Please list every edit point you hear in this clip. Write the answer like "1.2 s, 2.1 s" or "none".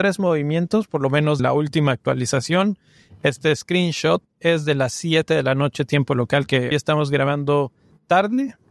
1.4 s, 6.7 s